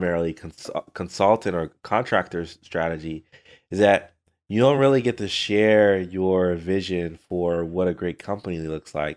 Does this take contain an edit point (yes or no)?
no